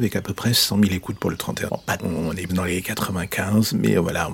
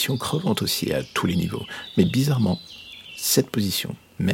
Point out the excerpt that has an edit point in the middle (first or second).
first